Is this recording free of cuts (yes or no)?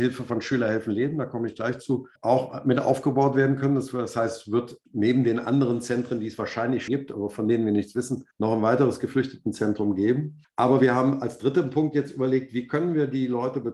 no